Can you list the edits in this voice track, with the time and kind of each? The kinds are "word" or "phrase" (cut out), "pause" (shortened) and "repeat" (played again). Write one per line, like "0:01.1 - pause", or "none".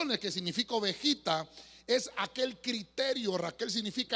none

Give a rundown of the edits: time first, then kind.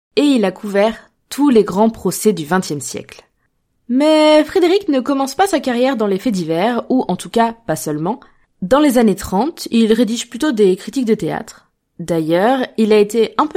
none

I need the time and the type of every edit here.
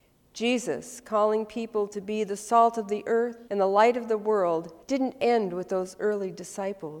0:03.5 - pause
0:04.8 - pause

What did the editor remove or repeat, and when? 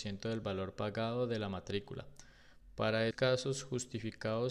0:03.1 - word

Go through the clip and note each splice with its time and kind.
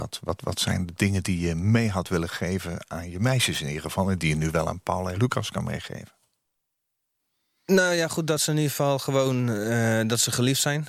none

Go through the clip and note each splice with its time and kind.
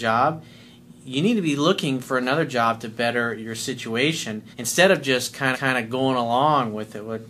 0:04.5 - pause
0:05.5 - repeat

